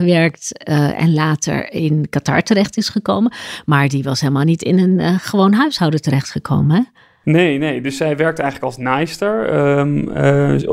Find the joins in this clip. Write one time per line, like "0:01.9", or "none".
none